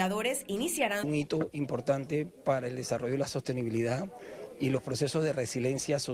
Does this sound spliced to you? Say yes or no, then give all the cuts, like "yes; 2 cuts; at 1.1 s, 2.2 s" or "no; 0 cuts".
yes; 1 cut; at 1.0 s